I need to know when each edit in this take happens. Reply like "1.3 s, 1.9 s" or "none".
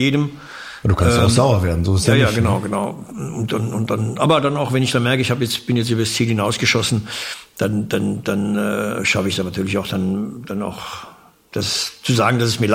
none